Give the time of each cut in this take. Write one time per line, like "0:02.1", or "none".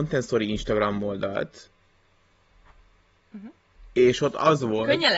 none